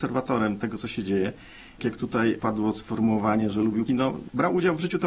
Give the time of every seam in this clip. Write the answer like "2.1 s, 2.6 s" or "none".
1.8 s, 3.9 s